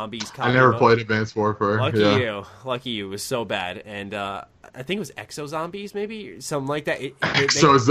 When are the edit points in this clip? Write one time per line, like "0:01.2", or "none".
0:04.7